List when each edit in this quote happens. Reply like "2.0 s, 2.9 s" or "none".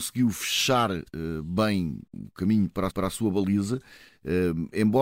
2.1 s, 2.9 s